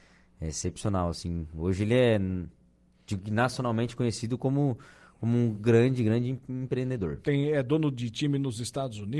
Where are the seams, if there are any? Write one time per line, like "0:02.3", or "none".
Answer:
none